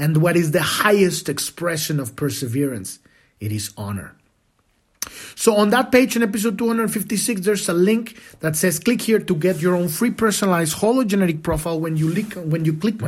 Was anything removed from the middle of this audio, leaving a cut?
no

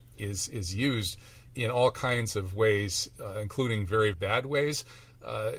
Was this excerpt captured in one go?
no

